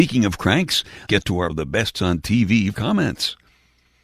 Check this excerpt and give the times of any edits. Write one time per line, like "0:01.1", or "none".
0:01.1
0:01.5
0:01.9
0:02.7